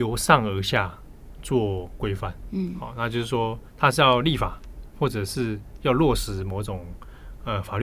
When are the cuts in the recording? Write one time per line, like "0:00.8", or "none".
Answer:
0:03.7